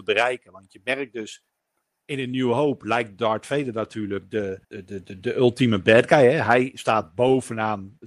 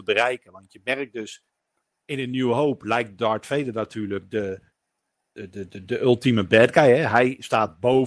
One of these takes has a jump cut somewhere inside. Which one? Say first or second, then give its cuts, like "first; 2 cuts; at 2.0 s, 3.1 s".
first; 1 cut; at 4.6 s